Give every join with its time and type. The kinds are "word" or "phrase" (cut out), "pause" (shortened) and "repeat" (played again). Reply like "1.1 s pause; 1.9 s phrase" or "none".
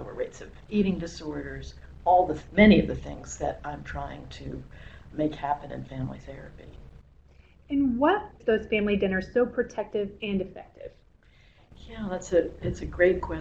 5.1 s word; 8.4 s word